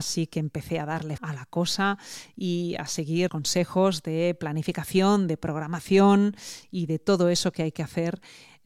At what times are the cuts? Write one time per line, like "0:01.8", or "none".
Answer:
0:01.2
0:03.3